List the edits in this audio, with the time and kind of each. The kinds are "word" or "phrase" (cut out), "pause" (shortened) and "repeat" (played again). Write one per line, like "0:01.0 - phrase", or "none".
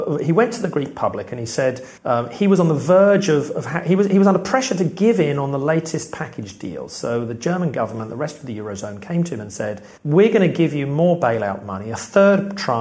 0:02.0 - pause
0:10.0 - pause